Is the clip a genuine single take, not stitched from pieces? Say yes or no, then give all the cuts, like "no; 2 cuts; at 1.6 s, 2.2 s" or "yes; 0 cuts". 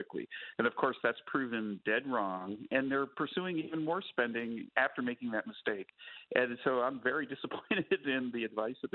yes; 0 cuts